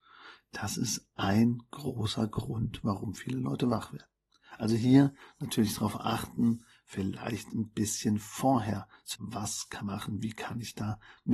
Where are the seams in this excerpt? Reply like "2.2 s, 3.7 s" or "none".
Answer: 9.1 s, 9.8 s